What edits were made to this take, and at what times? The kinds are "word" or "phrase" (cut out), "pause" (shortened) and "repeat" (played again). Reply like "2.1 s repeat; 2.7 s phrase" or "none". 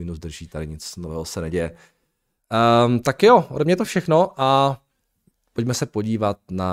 none